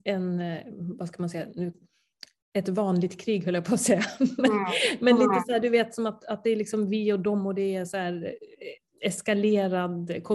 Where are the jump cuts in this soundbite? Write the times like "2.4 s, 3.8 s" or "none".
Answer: none